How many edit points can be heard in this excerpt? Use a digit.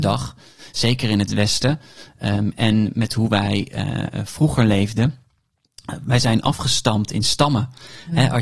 0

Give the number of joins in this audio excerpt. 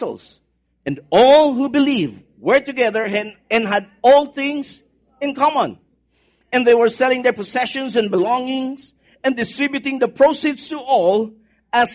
0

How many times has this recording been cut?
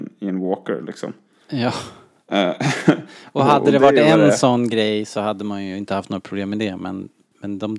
0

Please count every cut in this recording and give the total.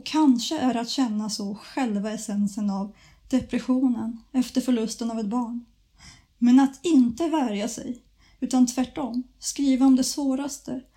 0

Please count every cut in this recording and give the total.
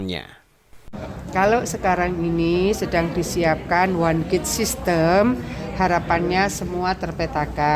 0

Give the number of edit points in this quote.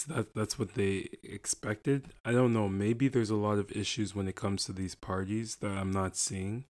0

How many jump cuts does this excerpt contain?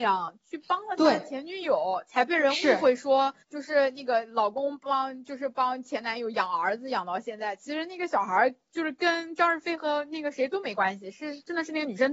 1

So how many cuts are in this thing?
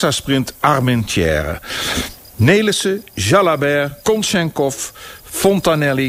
1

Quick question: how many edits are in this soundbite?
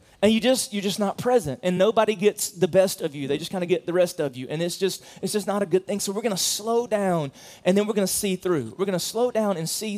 0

